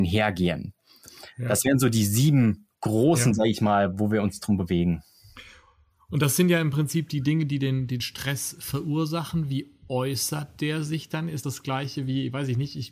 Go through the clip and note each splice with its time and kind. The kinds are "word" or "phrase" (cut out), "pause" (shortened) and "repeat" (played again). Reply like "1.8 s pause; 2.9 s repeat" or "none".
2.7 s pause; 8.0 s word; 11.4 s word